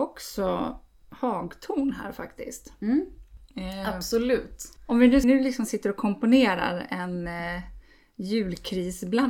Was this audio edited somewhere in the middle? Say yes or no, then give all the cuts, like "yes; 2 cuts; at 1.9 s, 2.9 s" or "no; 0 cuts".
yes; 1 cut; at 5.2 s